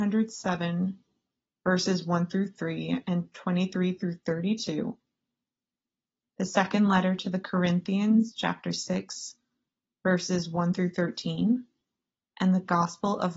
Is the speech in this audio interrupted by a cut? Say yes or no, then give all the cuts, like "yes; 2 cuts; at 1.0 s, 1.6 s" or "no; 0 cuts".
no; 0 cuts